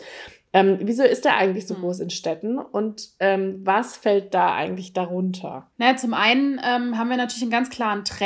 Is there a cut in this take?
yes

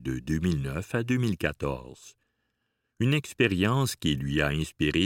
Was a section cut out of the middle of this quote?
no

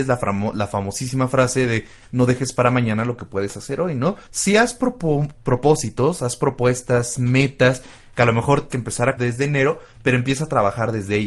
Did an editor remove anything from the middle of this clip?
yes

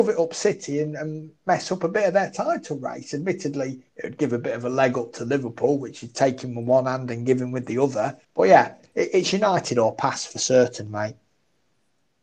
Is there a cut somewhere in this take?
yes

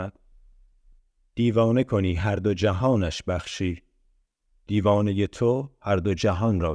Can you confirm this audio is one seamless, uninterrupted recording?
yes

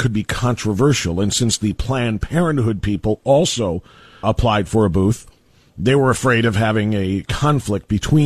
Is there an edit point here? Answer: yes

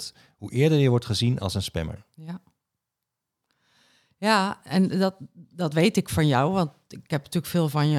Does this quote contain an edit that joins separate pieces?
no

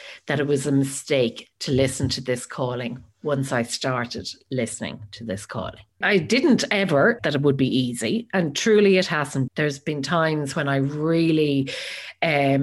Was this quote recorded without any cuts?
no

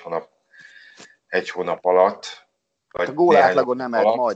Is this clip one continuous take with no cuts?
yes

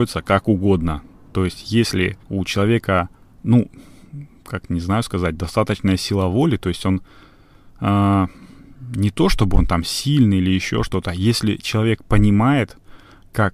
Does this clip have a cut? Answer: yes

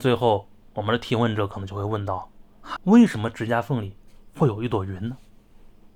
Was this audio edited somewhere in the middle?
yes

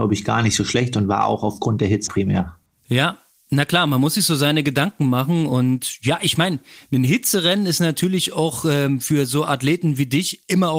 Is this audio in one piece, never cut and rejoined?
no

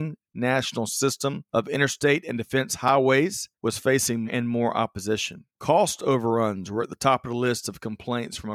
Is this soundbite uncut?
no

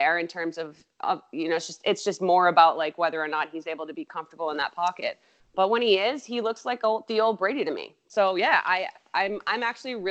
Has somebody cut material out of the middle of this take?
no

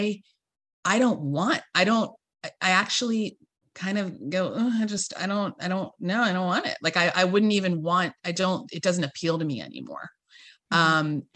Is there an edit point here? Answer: no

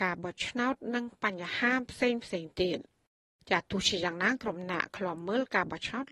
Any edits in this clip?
no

